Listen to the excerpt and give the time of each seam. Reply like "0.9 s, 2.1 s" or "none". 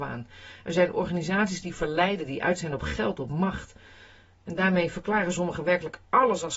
none